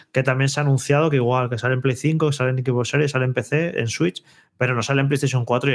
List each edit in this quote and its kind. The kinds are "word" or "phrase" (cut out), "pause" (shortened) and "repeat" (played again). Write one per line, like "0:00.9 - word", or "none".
none

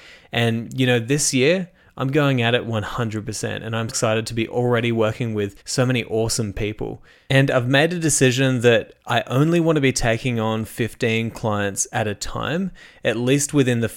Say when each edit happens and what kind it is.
0:03.9 - word
0:05.6 - pause

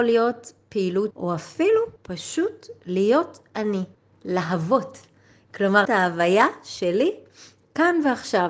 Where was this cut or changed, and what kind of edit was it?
0:01.1 - phrase
0:02.0 - pause
0:03.9 - pause
0:05.8 - word

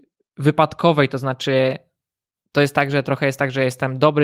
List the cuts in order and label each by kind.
none

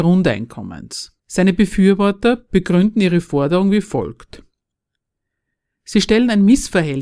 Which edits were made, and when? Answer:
0:01.2 - pause

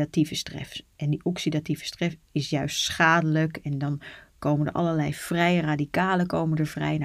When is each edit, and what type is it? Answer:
none

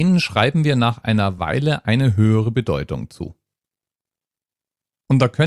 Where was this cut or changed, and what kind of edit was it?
none

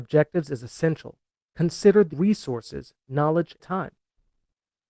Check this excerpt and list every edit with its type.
0:02.1 - word
0:03.6 - word

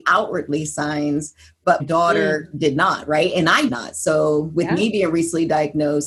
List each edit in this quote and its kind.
0:01.8 - word
0:03.7 - word

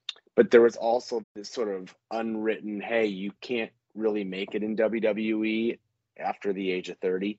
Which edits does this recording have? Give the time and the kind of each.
0:01.2 - word

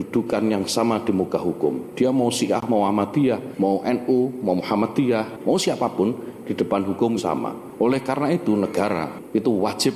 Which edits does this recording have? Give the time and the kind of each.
0:07.2 - word

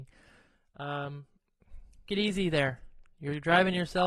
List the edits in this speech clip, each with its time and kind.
0:02.1 - word

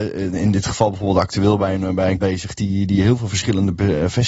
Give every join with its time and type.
0:02.2 - word

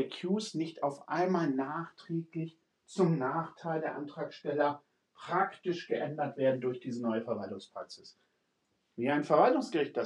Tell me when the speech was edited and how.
none

